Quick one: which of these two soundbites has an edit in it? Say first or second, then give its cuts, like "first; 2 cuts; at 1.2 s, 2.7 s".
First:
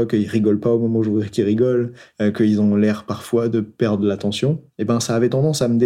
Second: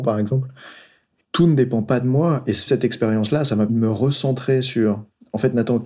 second; 3 cuts; at 1.2 s, 2.7 s, 3.7 s